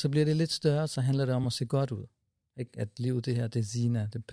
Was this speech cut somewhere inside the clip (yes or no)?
no